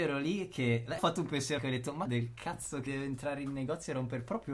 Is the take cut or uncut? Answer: cut